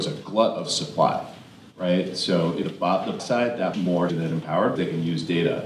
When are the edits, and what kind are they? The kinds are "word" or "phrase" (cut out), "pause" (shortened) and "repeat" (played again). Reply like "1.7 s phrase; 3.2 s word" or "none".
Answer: 2.6 s word; 3.2 s word; 3.7 s word; 4.1 s word; 4.8 s word